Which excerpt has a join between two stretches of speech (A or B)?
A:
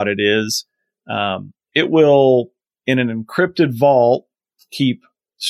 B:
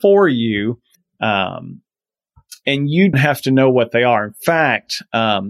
B